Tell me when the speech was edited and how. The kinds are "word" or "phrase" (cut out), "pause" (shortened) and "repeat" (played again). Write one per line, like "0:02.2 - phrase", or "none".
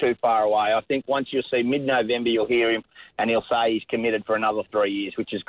none